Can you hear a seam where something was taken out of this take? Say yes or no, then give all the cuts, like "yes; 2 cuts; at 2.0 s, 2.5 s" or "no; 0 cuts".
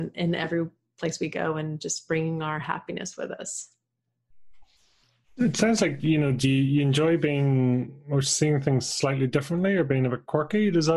no; 0 cuts